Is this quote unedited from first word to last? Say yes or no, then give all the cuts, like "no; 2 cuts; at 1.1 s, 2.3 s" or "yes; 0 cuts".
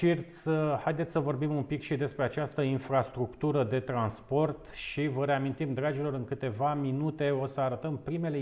yes; 0 cuts